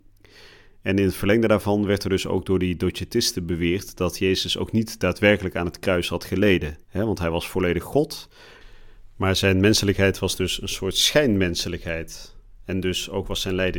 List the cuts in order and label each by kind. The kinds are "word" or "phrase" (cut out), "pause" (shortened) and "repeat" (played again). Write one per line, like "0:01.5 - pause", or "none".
0:06.8 - pause